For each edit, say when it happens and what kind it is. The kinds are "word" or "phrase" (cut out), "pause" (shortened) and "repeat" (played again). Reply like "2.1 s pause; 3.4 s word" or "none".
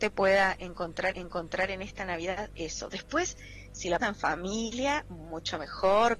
1.1 s repeat; 4.0 s word